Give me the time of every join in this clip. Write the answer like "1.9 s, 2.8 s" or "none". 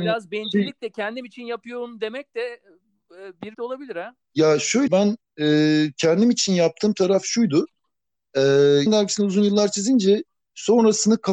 3.5 s, 4.2 s, 4.9 s, 8.9 s